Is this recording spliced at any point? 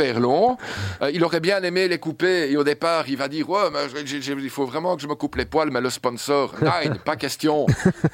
no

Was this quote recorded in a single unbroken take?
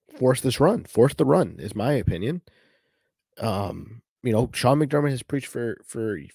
yes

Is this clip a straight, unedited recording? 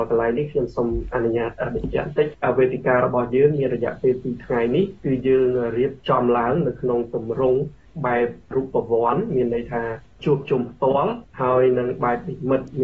no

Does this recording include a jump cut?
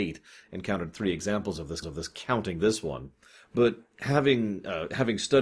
yes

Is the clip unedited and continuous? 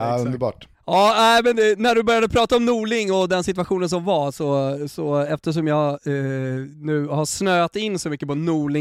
yes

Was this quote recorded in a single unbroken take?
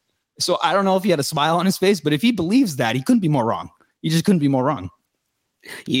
yes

